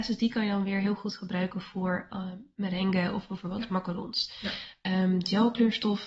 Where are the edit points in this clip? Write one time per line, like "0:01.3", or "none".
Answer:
none